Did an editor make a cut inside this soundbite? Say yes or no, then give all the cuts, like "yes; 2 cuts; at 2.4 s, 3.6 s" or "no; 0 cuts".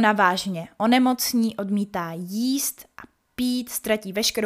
no; 0 cuts